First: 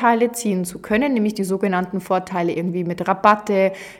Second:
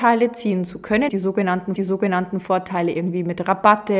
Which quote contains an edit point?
second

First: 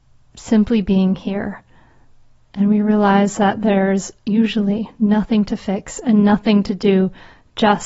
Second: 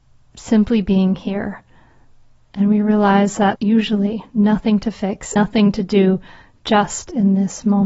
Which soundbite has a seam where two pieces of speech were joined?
second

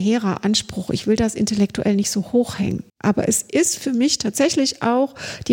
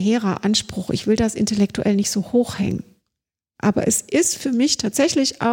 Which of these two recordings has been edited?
first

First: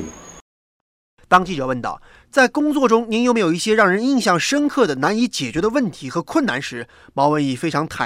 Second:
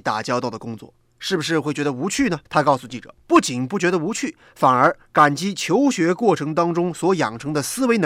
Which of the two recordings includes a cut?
second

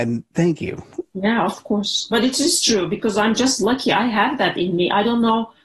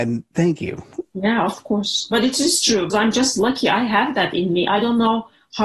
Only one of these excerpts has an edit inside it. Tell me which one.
second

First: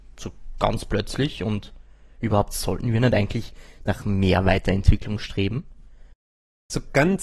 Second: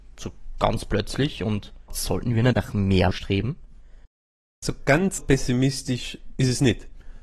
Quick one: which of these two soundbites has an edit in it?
second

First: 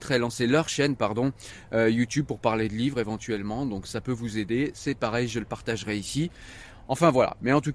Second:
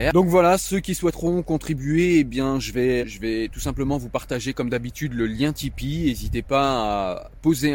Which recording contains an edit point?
second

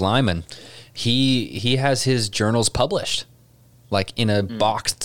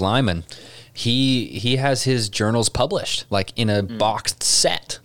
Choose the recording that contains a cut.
second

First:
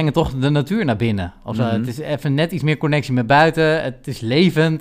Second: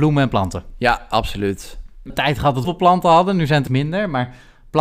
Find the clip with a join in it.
second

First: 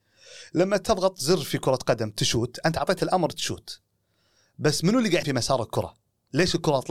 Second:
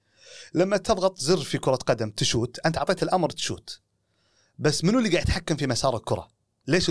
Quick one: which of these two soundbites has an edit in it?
first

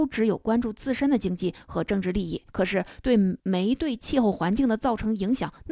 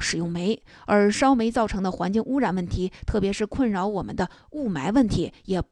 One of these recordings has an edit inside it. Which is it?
first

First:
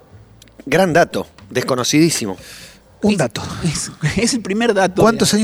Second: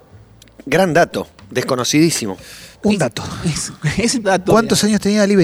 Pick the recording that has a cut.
second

